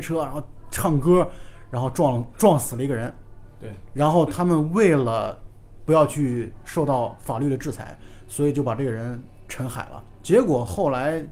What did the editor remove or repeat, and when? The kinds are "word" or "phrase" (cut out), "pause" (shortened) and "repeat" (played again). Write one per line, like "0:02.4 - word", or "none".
0:03.5 - pause